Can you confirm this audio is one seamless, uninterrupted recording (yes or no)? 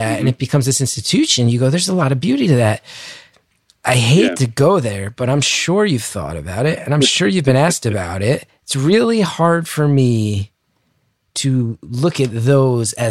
no